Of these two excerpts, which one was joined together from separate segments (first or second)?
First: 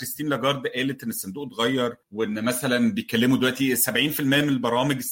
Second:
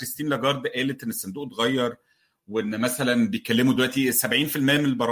first